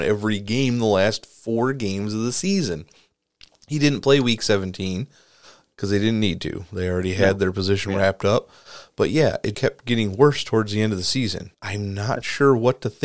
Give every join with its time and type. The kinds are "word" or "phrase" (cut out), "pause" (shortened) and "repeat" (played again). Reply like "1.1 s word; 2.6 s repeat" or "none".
9.5 s word; 11.5 s pause